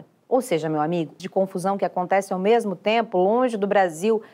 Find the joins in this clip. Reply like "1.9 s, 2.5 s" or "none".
1.2 s